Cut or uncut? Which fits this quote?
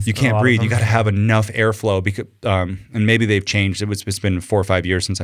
uncut